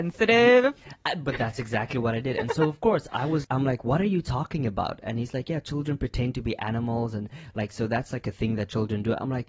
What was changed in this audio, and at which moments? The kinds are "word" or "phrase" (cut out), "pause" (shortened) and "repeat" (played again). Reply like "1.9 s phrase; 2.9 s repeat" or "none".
3.4 s word